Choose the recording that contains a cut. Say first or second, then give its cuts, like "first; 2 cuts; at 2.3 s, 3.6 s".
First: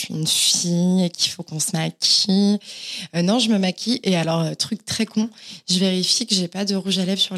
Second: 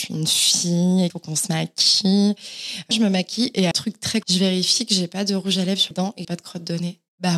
second; 6 cuts; at 1.1 s, 2.9 s, 3.7 s, 4.2 s, 5.9 s, 6.2 s